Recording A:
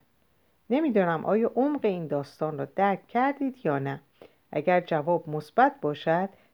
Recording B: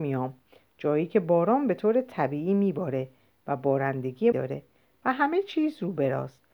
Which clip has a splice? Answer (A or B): B